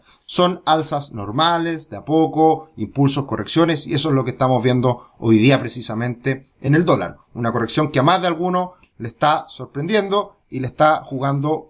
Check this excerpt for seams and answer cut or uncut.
uncut